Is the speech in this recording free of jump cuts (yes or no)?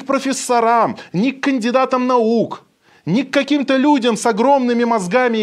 yes